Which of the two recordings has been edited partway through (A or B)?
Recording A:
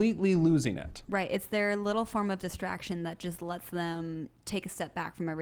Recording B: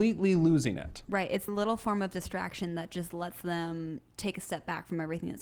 B